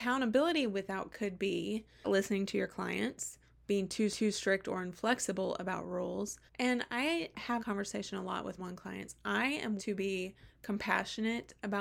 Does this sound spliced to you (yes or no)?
yes